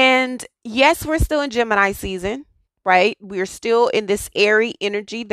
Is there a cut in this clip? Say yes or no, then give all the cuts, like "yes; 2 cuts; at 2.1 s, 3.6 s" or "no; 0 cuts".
no; 0 cuts